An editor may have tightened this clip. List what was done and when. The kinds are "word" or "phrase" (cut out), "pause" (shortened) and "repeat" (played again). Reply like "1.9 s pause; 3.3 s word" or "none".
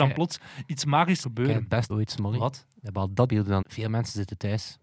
1.2 s word; 1.9 s word; 3.3 s phrase; 3.6 s word